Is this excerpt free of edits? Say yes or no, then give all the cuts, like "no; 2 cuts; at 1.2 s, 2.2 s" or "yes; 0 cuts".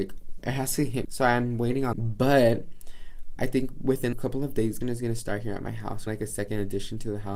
no; 6 cuts; at 1.0 s, 1.9 s, 3.4 s, 4.1 s, 4.8 s, 6.1 s